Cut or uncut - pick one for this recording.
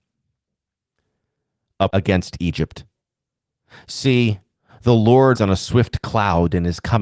cut